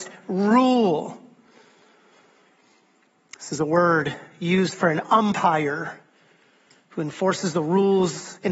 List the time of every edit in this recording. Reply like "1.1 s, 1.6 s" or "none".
6.8 s